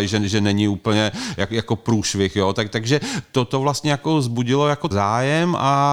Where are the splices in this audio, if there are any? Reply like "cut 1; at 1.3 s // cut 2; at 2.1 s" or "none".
cut 1; at 4.9 s